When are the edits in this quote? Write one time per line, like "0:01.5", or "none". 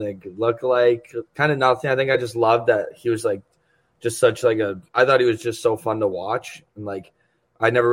0:01.3
0:04.9